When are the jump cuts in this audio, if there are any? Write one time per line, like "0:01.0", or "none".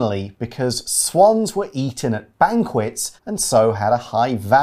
0:03.2